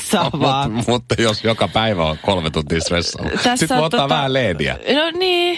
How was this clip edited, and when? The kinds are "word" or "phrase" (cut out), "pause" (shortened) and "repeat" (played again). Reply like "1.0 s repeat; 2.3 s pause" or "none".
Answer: none